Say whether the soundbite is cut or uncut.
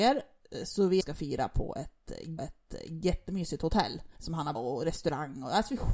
cut